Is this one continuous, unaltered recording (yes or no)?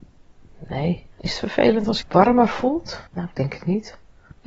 no